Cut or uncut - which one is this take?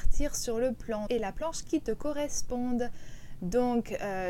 cut